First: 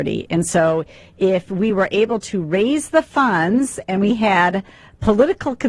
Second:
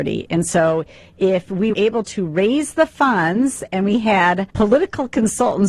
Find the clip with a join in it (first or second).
second